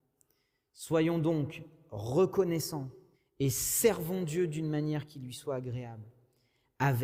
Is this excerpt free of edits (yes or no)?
no